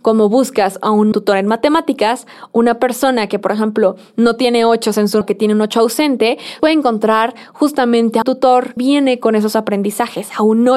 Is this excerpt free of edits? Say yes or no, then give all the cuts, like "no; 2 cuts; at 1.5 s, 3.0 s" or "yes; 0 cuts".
no; 5 cuts; at 1.1 s, 5.2 s, 6.6 s, 8.2 s, 8.8 s